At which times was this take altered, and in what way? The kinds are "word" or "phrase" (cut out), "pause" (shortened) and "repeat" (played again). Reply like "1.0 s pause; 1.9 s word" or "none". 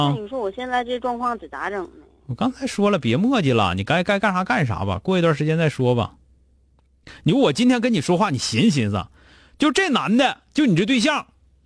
none